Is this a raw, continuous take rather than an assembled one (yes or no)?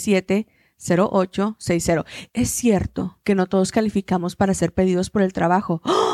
yes